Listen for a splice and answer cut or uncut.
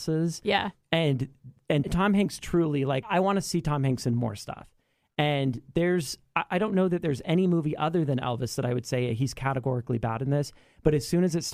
cut